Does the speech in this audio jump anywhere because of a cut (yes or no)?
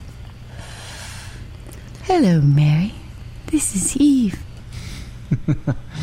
no